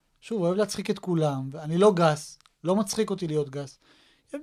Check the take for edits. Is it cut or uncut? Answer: uncut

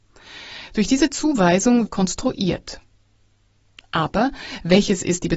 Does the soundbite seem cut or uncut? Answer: cut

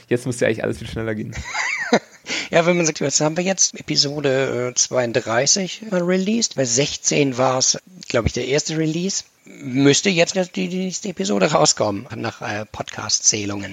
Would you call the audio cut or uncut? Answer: cut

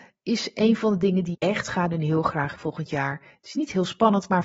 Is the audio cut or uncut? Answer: cut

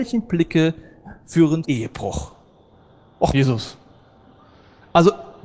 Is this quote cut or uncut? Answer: cut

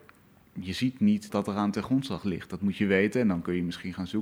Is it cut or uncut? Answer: cut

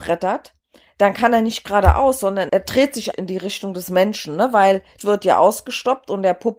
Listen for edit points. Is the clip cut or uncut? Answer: cut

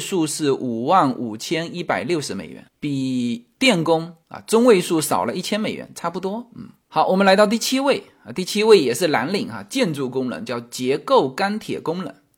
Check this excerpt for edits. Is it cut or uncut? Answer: cut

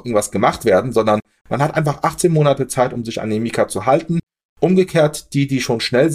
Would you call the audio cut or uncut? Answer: uncut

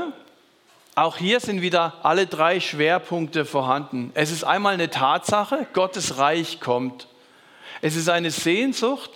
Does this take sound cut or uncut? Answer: uncut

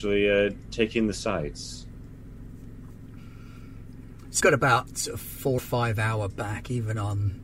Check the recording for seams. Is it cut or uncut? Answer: cut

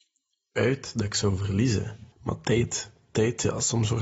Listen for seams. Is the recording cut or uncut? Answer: cut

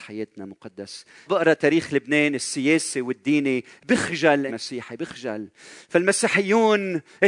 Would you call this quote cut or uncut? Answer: cut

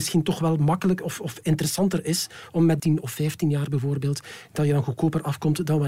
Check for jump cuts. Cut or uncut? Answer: cut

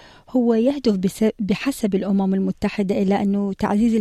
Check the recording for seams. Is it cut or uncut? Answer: uncut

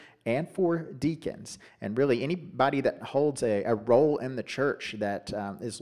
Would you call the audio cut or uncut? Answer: uncut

